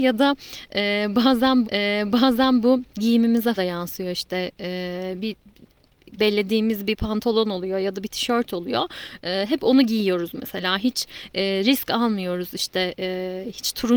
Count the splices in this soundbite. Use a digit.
3